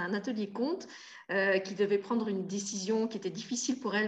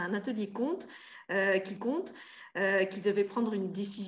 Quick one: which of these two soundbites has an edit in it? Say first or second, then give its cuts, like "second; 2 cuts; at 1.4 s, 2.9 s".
second; 1 cut; at 1.8 s